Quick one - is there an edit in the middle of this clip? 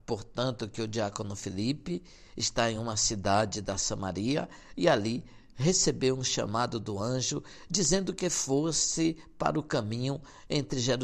no; 0 cuts

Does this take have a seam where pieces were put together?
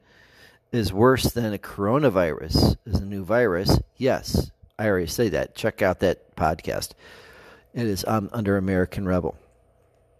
no; 0 cuts

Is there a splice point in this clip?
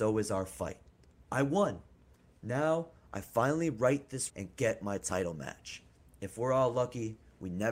yes; 1 cut; at 4.3 s

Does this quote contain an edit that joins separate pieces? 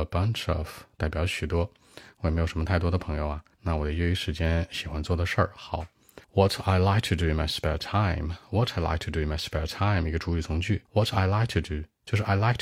yes; 3 cuts; at 3.5 s, 6.2 s, 10.9 s

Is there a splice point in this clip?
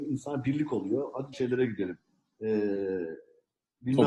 yes; 1 cut; at 1.3 s

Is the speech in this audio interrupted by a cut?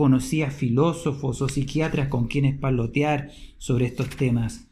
no; 0 cuts

